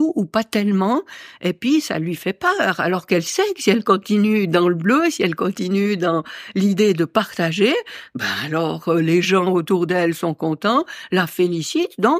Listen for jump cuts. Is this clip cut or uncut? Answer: uncut